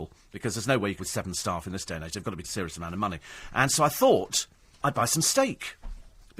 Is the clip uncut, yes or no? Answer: no